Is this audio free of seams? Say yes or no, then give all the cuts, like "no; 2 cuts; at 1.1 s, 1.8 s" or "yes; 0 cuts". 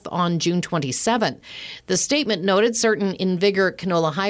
yes; 0 cuts